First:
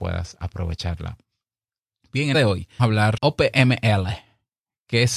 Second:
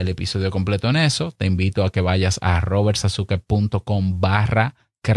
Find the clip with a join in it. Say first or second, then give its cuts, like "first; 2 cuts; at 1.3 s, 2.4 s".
first; 3 cuts; at 2.3 s, 2.8 s, 3.2 s